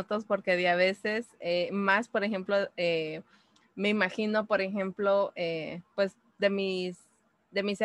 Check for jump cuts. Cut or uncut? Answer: uncut